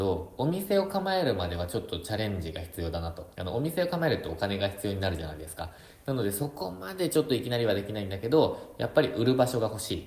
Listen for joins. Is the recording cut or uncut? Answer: cut